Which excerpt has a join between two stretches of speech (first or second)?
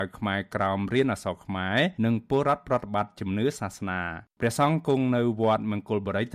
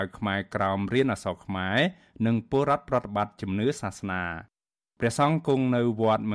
first